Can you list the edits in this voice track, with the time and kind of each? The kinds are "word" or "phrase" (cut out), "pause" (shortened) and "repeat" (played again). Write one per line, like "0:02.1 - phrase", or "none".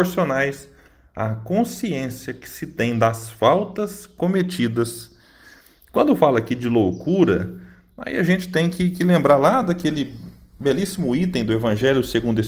none